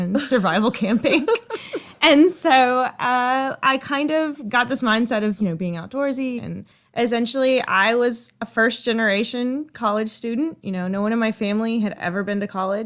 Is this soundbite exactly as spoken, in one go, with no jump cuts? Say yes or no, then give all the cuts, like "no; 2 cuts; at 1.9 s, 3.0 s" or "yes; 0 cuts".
no; 2 cuts; at 5.4 s, 6.4 s